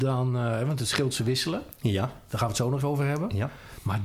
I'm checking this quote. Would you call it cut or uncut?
cut